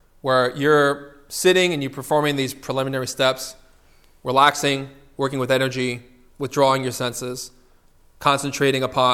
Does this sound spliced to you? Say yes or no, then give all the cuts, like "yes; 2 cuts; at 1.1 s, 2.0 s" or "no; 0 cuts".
no; 0 cuts